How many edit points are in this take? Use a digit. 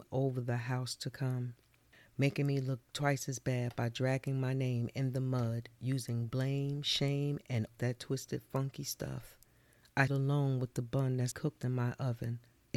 3